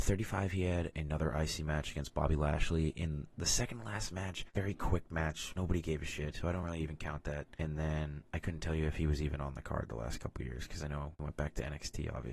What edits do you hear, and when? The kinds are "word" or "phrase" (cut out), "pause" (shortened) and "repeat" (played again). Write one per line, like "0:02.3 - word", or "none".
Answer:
none